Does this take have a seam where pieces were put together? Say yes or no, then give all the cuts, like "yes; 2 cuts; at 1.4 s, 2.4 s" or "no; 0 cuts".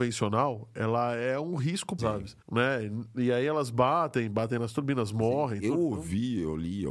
yes; 2 cuts; at 2.0 s, 2.4 s